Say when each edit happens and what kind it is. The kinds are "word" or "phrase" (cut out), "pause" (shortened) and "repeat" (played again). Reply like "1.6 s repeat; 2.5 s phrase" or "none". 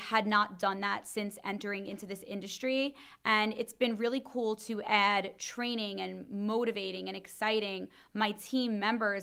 none